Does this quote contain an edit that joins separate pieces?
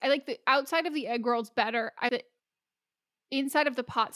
yes; 1 cut; at 2.1 s

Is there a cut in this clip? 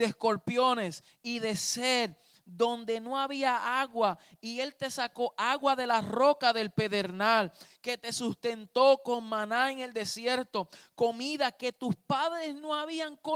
no; 0 cuts

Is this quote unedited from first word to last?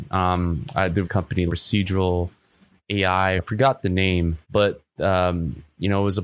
no; 4 cuts; at 1.0 s, 1.5 s, 3.4 s, 4.4 s

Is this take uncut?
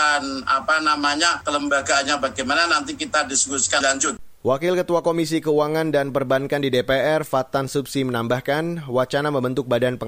no; 1 cut; at 3.8 s

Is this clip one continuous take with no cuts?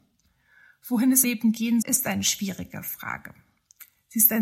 no; 2 cuts; at 1.2 s, 1.8 s

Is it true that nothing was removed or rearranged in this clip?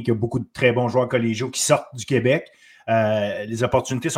yes; 0 cuts

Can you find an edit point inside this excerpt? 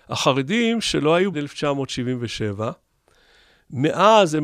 yes; 1 cut; at 1.3 s

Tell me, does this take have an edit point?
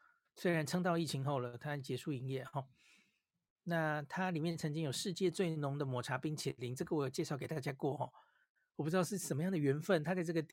no; 0 cuts

